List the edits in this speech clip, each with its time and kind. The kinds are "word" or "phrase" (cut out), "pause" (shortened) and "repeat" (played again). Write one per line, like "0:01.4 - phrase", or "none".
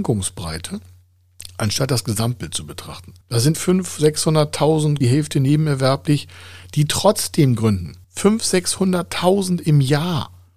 0:03.2 - pause
0:03.5 - word
0:05.0 - phrase
0:08.0 - pause